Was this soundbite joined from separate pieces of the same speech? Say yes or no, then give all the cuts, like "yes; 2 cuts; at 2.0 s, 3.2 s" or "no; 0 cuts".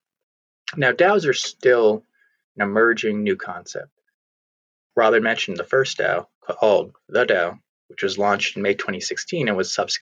yes; 1 cut; at 6.3 s